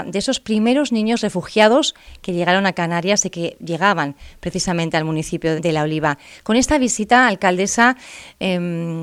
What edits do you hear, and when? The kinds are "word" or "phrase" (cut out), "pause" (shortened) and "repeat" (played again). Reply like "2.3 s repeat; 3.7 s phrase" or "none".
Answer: 5.6 s phrase